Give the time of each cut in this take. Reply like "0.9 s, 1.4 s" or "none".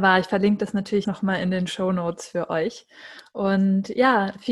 1.0 s